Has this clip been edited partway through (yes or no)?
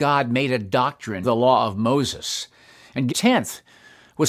yes